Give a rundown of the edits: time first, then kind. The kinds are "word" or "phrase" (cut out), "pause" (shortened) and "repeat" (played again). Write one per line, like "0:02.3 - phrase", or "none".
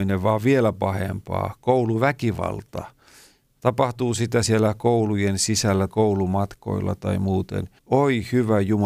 0:04.4 - word
0:05.9 - word
0:07.8 - pause